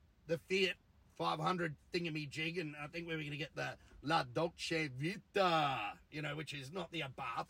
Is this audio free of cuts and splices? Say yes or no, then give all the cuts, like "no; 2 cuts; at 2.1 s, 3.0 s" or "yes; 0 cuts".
yes; 0 cuts